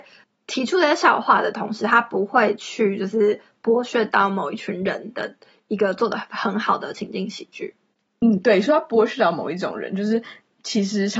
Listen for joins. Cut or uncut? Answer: uncut